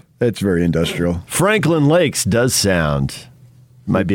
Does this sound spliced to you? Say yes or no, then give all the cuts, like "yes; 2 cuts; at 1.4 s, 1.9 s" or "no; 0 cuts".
no; 0 cuts